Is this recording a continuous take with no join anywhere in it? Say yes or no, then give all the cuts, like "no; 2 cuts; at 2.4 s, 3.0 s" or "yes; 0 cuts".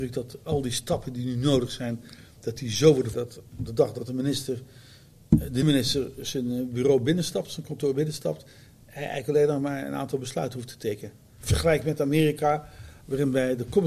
no; 2 cuts; at 3.1 s, 5.6 s